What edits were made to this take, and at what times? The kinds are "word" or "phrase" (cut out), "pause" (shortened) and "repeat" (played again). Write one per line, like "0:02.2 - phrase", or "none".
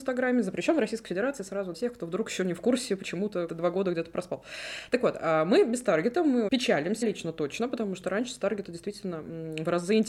0:01.7 - phrase
0:03.5 - word
0:06.5 - word
0:07.0 - word

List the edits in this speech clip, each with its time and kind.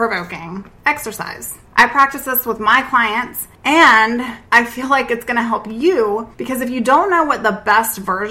0:01.7 - pause
0:04.5 - pause
0:06.3 - pause

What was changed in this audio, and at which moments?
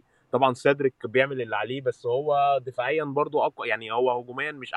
none

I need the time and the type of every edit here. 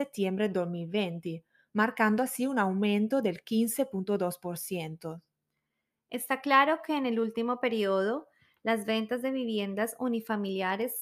none

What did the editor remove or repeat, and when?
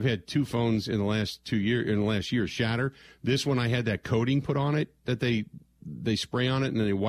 none

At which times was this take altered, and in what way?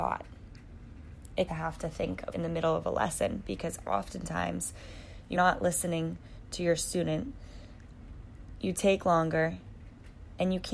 0:01.5 - phrase
0:02.3 - word
0:05.4 - word

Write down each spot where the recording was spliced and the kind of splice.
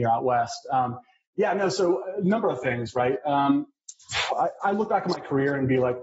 none

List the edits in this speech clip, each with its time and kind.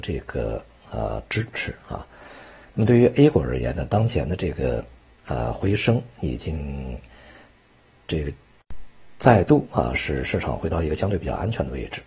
none

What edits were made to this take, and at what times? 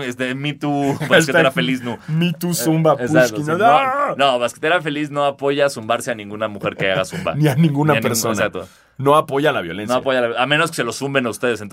none

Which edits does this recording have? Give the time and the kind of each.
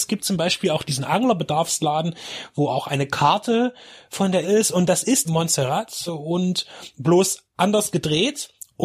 0:04.4 - word
0:05.2 - word
0:06.1 - word

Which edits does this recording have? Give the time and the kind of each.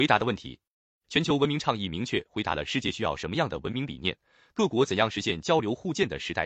none

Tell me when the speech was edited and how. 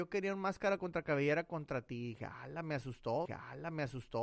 0:03.3 - repeat

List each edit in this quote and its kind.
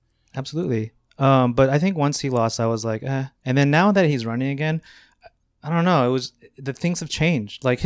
none

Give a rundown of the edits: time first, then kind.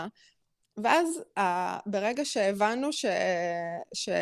none

